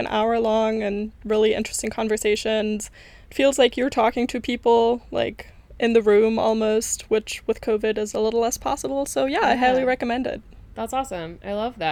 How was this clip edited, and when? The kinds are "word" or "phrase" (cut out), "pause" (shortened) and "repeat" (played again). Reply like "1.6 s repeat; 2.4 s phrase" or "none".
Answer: none